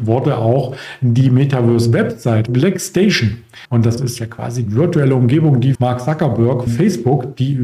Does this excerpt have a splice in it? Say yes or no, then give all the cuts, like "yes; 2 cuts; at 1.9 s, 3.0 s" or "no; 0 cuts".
yes; 6 cuts; at 2.5 s, 3.6 s, 4.0 s, 4.7 s, 5.7 s, 6.7 s